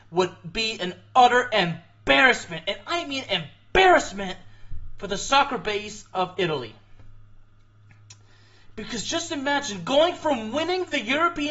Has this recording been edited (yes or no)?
no